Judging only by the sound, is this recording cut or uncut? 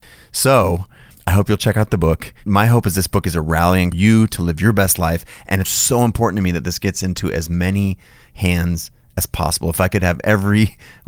cut